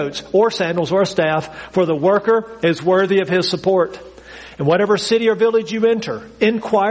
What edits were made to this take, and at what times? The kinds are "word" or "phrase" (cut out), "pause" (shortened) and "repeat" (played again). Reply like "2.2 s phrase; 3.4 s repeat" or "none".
none